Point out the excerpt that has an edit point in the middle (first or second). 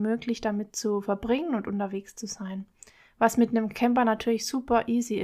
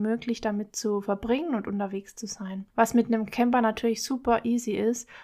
second